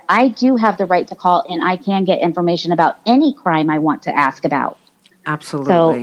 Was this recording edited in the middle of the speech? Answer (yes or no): no